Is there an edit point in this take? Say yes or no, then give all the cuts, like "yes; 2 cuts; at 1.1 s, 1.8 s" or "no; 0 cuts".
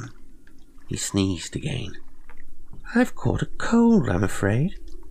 no; 0 cuts